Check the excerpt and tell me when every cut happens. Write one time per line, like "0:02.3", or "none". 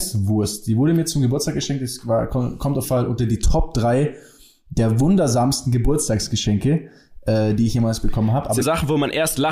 0:02.8
0:08.6